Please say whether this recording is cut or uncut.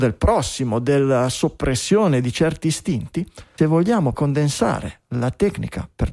cut